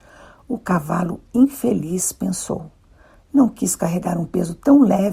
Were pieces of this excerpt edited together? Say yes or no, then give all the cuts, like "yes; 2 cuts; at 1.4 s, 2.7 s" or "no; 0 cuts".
no; 0 cuts